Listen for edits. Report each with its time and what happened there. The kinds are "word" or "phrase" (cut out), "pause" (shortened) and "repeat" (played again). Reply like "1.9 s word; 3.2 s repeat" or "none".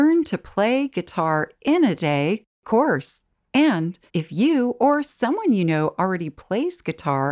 4.1 s pause